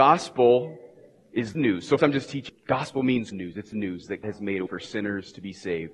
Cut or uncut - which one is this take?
cut